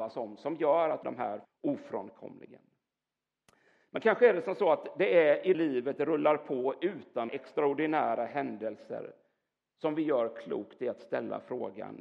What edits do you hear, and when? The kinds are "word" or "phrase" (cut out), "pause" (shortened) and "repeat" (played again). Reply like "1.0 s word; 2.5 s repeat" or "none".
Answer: 1.0 s phrase; 1.4 s word; 5.5 s phrase; 7.3 s word